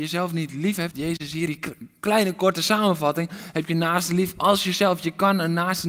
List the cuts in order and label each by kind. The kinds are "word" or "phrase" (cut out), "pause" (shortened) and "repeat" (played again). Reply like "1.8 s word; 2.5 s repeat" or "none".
0.9 s word; 1.5 s word

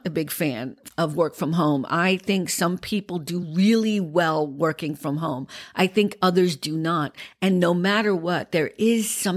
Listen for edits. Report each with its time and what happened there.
none

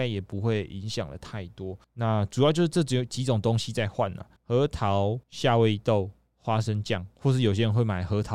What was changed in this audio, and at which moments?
1.8 s pause; 4.4 s pause; 5.2 s pause

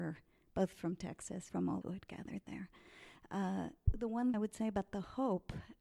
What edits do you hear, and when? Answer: 1.5 s word; 1.8 s phrase; 3.9 s word; 4.3 s word

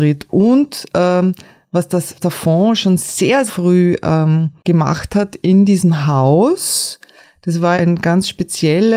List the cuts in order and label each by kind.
2.2 s word; 3.5 s word; 4.6 s pause; 7.7 s word

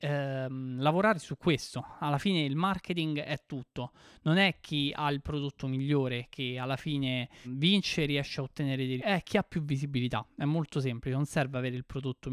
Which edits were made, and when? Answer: 7.4 s word; 9.0 s word

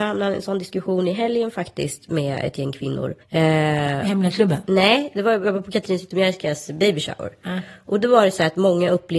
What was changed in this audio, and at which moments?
3.2 s pause

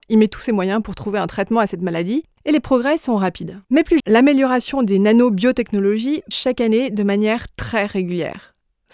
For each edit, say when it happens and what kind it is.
3.6 s pause; 4.0 s word; 6.3 s word

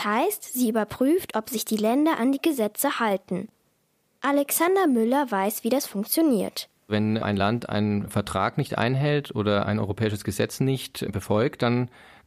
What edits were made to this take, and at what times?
none

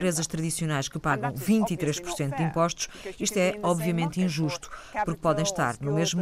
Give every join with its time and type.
none

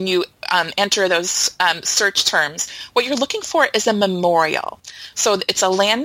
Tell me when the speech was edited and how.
none

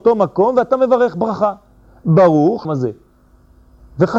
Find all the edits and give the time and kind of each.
2.6 s phrase

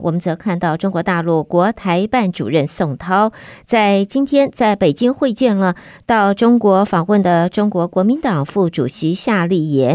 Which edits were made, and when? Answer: none

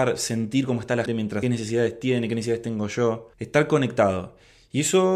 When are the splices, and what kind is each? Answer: 1.1 s word; 1.4 s phrase; 3.3 s pause

